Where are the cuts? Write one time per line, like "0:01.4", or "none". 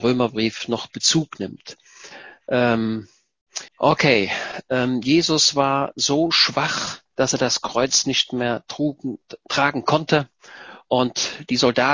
0:03.7
0:07.1